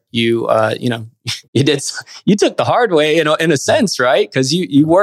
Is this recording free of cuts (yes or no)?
no